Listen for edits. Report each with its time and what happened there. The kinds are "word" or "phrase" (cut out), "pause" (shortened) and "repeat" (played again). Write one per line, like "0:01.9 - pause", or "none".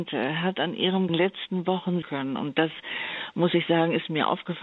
0:01.1 - phrase
0:02.0 - word